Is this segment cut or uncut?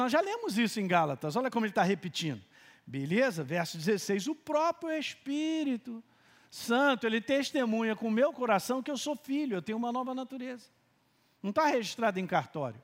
uncut